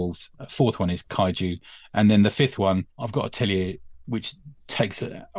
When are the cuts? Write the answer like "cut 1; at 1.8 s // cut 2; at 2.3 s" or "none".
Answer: cut 1; at 2.9 s